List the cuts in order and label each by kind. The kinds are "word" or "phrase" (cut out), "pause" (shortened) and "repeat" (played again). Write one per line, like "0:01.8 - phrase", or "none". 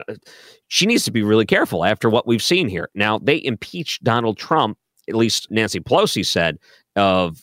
0:05.5 - word